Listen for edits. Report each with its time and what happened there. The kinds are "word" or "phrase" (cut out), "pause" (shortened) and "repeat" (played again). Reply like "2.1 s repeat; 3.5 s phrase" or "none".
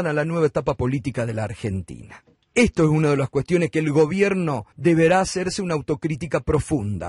2.3 s pause; 4.7 s pause